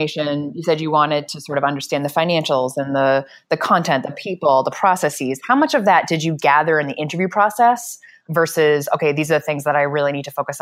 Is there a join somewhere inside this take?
no; 0 cuts

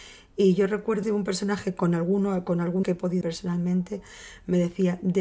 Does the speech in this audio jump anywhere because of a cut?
yes; 3 cuts; at 1.0 s, 2.8 s, 3.2 s

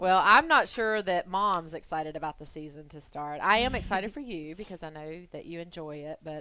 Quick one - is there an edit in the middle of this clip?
no; 0 cuts

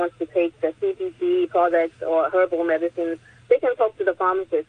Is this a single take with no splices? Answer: yes; 0 cuts

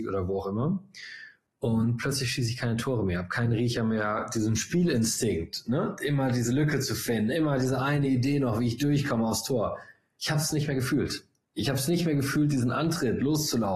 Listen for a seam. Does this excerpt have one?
no; 0 cuts

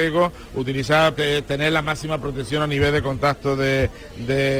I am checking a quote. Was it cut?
yes; 1 cut; at 1.2 s

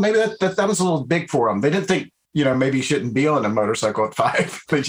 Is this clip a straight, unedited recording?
yes; 0 cuts

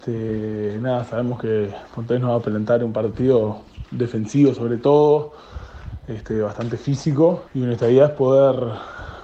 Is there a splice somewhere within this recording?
yes; 1 cut; at 7.5 s

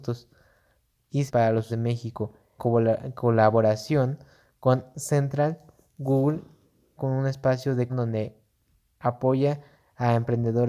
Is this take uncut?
no; 5 cuts; at 1.3 s, 1.7 s, 2.6 s, 7.0 s, 7.9 s

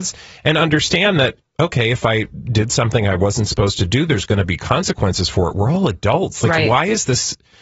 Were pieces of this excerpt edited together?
no; 0 cuts

